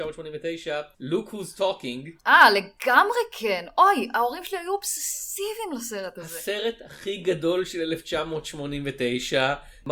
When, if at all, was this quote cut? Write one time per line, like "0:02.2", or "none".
0:00.9